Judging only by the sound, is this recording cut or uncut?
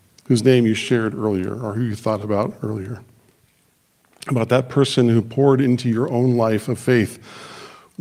uncut